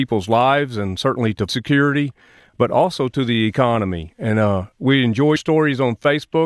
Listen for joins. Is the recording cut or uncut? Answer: cut